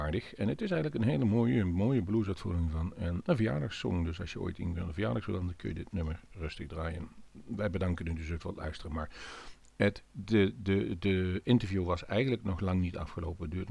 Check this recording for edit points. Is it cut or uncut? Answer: uncut